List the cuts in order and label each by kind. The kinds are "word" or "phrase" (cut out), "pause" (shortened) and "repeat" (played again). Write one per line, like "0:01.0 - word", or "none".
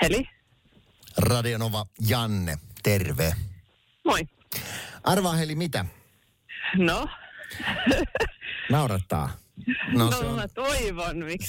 none